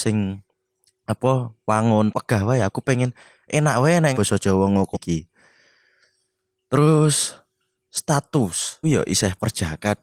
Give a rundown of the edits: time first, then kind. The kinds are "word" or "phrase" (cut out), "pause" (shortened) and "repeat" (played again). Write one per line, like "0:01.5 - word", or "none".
0:02.1 - word
0:04.1 - word
0:04.9 - word
0:08.8 - word

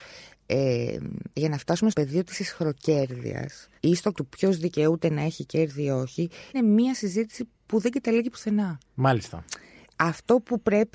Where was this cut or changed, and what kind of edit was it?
0:01.3 - pause
0:01.9 - word
0:03.8 - pause
0:04.1 - word
0:06.5 - word
0:07.6 - pause
0:08.8 - pause

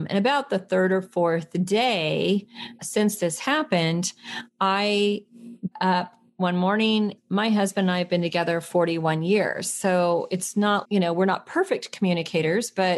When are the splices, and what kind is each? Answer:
0:02.8 - word
0:05.7 - word
0:07.2 - word
0:10.8 - word

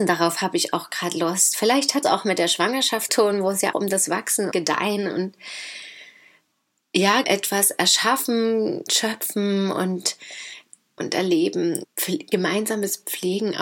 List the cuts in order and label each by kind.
0:02.0 - word
0:03.1 - word
0:03.7 - word
0:04.5 - word
0:07.2 - word
0:08.9 - word
0:11.0 - word
0:11.8 - word

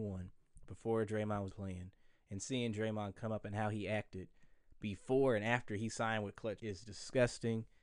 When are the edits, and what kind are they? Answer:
0:01.5 - word
0:06.6 - word

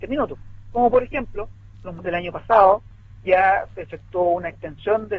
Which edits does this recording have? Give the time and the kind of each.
0:02.0 - word

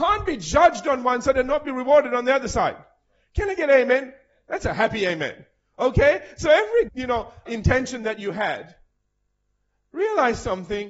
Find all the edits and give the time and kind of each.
0:06.9 - word
0:07.5 - word

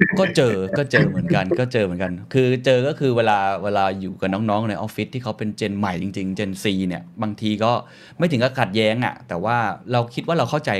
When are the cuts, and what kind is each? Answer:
none

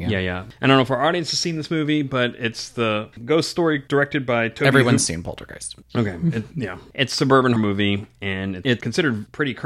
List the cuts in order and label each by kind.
0:07.6 - word

